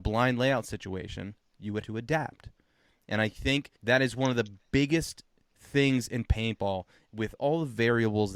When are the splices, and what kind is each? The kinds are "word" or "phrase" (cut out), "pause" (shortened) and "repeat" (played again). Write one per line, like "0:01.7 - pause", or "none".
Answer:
0:01.8 - word
0:03.8 - pause